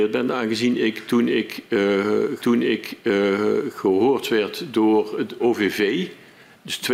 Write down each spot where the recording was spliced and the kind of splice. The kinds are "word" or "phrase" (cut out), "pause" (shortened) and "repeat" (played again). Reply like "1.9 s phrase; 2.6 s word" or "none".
2.4 s repeat; 5.4 s word